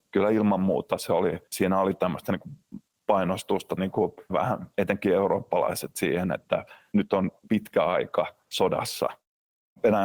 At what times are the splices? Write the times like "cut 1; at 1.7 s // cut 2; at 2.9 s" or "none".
cut 1; at 1.5 s // cut 2; at 3.8 s // cut 3; at 4.3 s // cut 4; at 6.9 s // cut 5; at 7.5 s // cut 6; at 8.4 s